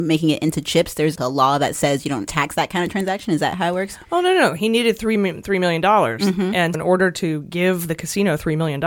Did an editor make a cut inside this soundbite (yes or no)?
yes